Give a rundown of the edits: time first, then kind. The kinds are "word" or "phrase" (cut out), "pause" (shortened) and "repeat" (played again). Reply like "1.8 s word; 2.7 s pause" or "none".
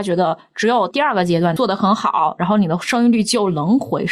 none